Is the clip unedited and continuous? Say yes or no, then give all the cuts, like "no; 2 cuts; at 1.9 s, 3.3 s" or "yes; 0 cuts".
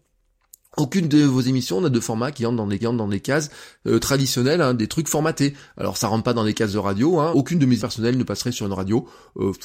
no; 3 cuts; at 2.8 s, 7.3 s, 7.8 s